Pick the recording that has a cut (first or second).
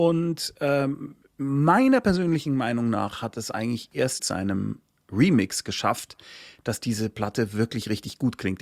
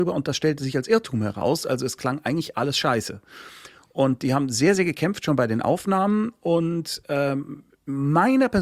first